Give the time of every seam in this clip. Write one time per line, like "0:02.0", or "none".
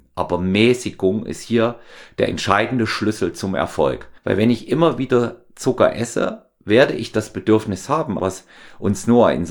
0:04.2
0:08.2